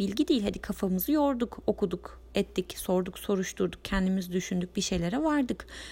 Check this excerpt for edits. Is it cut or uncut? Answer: uncut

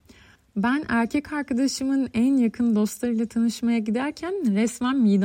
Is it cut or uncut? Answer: uncut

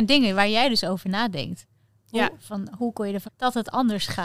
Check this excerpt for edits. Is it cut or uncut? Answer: cut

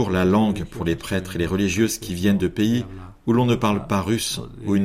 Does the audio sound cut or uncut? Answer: uncut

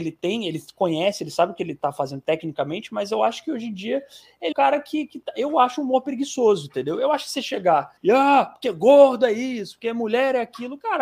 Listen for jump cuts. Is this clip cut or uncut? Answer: cut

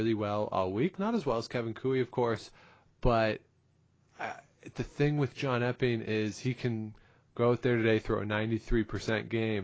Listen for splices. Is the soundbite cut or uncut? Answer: uncut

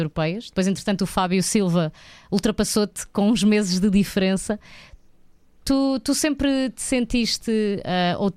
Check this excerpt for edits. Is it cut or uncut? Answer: uncut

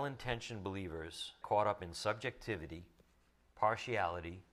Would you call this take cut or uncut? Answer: cut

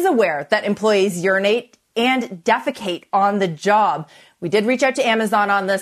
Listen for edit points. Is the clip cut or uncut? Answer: uncut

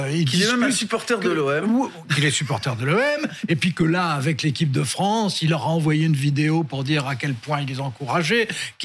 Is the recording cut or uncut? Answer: uncut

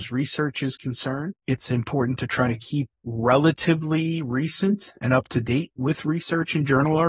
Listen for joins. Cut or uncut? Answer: cut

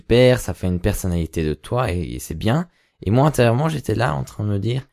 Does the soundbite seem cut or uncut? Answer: uncut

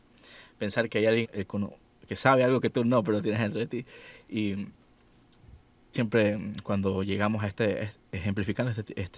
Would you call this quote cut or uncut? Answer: cut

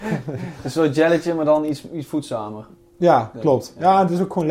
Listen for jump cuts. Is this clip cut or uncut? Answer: uncut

